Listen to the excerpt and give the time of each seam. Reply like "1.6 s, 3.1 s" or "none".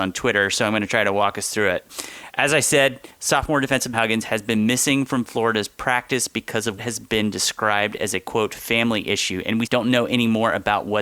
3.9 s, 6.8 s, 9.7 s